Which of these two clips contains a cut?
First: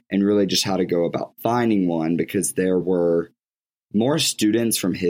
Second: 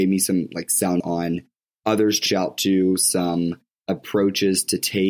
second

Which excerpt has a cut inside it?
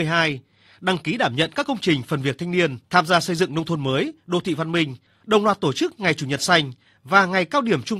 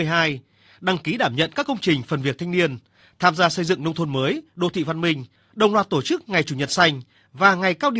first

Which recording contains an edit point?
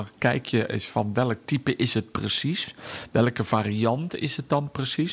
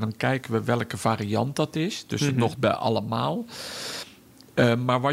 second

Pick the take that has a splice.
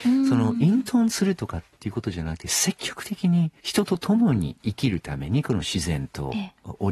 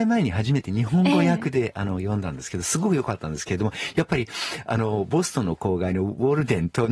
first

